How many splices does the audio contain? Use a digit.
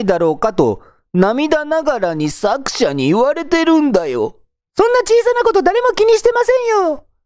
0